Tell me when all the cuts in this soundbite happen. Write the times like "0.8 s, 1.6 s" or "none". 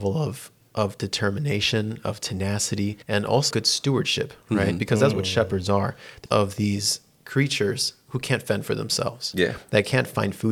3.0 s, 3.5 s, 5.1 s, 6.3 s